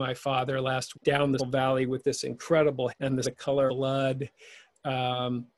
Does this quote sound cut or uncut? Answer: cut